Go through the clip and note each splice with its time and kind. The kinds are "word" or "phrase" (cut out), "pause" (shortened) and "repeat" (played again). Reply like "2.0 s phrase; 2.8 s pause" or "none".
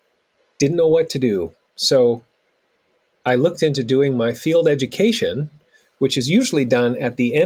none